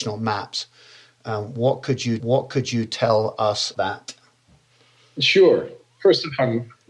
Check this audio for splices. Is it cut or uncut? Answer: cut